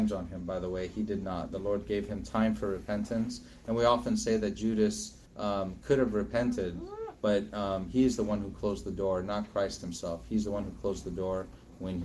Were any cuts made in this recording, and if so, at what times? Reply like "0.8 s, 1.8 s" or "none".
5.3 s